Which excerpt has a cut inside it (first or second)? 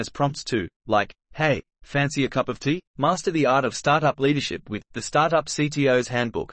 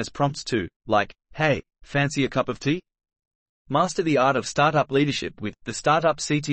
first